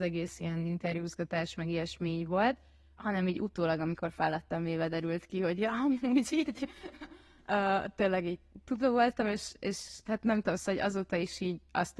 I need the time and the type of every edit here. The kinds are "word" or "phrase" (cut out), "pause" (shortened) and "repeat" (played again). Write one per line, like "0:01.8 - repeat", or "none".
none